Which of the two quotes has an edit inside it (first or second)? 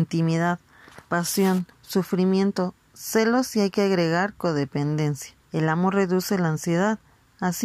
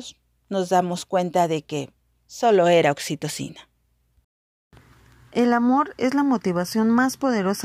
first